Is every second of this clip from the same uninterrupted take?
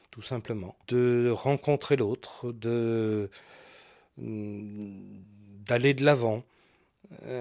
yes; 0 cuts

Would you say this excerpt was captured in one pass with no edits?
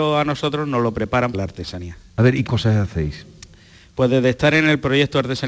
no; 2 cuts; at 1.3 s, 2.5 s

